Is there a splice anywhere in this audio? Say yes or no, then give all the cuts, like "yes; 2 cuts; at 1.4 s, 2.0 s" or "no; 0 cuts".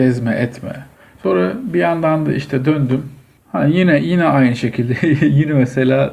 yes; 2 cuts; at 0.9 s, 3.4 s